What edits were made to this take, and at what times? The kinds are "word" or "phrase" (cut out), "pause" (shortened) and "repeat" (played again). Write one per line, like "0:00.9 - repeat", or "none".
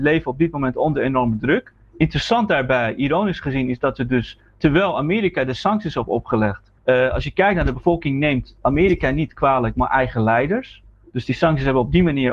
0:06.8 - pause
0:07.7 - word